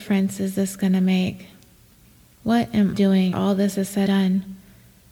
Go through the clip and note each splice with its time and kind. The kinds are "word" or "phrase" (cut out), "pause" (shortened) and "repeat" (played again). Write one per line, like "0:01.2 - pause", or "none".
0:02.9 - word
0:03.3 - word
0:04.1 - word